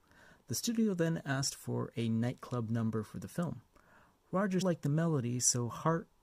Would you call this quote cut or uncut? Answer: cut